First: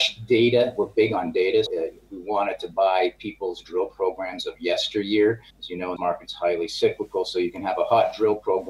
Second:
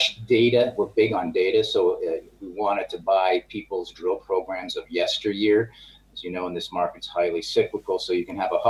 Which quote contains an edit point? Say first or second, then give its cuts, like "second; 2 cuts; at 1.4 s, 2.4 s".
first; 3 cuts; at 1.7 s, 5.5 s, 6.0 s